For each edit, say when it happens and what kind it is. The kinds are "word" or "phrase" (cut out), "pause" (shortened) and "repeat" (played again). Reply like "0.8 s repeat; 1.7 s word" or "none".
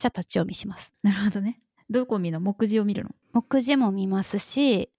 none